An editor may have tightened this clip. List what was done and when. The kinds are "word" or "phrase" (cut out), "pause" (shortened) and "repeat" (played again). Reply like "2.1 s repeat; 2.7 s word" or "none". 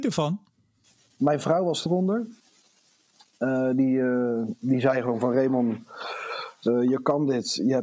1.9 s phrase